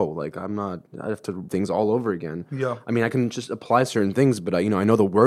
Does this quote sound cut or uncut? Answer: cut